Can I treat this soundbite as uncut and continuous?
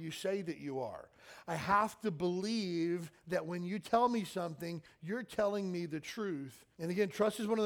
no; 1 cut; at 6.7 s

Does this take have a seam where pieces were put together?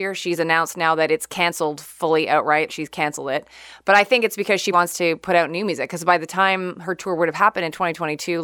yes; 2 cuts; at 2.7 s, 4.7 s

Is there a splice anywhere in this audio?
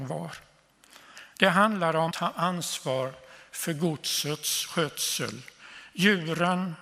yes; 1 cut; at 2.1 s

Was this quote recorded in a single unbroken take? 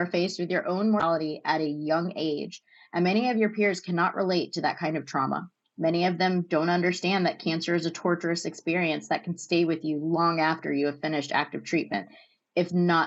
no; 1 cut; at 5.6 s

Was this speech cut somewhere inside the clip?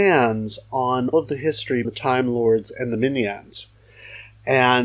yes; 2 cuts; at 1.1 s, 1.8 s

